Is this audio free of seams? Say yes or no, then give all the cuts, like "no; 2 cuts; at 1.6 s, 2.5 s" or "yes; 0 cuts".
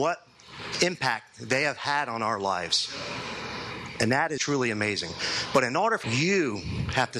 no; 2 cuts; at 4.4 s, 6.0 s